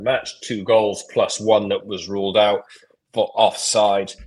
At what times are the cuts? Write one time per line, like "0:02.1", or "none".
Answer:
none